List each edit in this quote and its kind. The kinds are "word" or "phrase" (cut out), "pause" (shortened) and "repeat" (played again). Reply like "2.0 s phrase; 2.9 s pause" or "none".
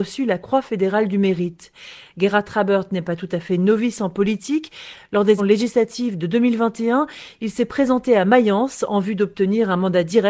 5.4 s word

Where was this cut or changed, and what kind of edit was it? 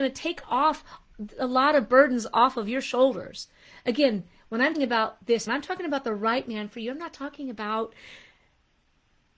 4.7 s word; 5.5 s word

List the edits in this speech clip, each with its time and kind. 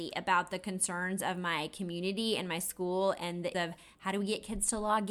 3.5 s word

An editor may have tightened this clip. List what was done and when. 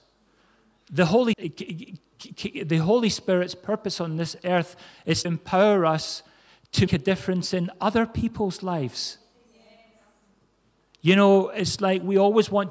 1.3 s word; 5.2 s word; 6.9 s word

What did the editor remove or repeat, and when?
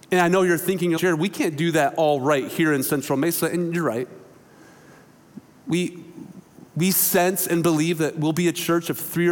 1.0 s word

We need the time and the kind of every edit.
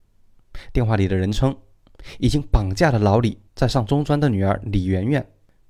3.5 s pause

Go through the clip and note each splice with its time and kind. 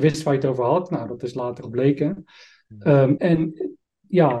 1.6 s phrase; 3.2 s word

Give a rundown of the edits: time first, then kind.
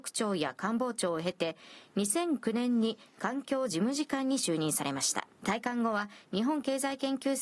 5.3 s pause

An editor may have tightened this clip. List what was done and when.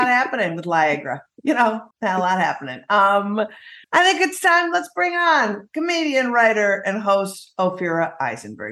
1.9 s pause; 3.8 s pause

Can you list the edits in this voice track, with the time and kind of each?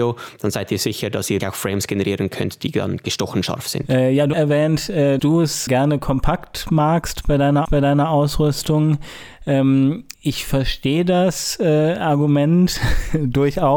1.4 s word; 4.3 s phrase; 5.2 s word; 5.7 s word; 7.6 s repeat; 10.1 s pause

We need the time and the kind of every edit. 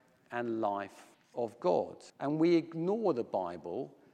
1.1 s pause; 2.1 s pause

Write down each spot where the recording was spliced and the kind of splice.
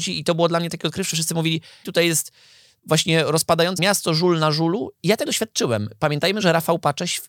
1.1 s word; 1.8 s word; 3.8 s word; 5.3 s word

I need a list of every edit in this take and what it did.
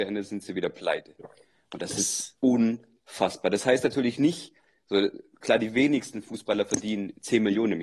none

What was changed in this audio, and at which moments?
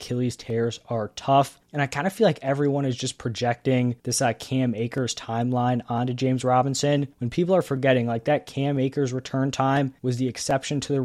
1.6 s pause; 4.0 s pause; 7.1 s pause; 10.0 s pause

